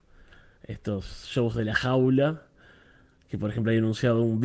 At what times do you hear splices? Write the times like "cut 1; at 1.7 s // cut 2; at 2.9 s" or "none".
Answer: none